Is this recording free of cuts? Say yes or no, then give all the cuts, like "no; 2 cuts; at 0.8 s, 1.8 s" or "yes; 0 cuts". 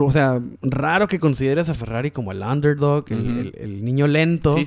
no; 1 cut; at 3.5 s